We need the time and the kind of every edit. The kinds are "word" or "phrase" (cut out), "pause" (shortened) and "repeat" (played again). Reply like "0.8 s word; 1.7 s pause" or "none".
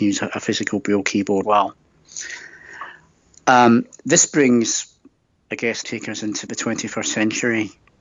1.4 s word; 5.8 s word; 6.5 s word